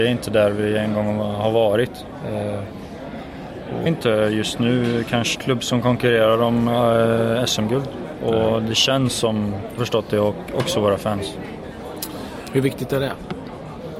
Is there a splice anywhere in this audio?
yes; 3 cuts; at 3.9 s, 5.3 s, 9.8 s

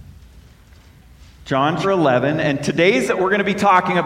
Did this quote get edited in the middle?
yes; 2 cuts; at 1.8 s, 3.1 s

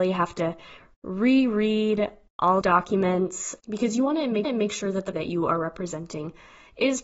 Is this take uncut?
no; 4 cuts; at 2.6 s, 3.6 s, 4.4 s, 5.1 s

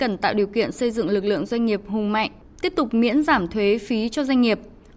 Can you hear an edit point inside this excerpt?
no; 0 cuts

